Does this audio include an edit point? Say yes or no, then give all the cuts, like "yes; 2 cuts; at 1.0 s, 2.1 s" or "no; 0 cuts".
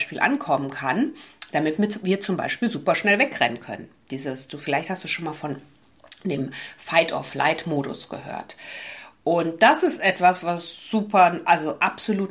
no; 0 cuts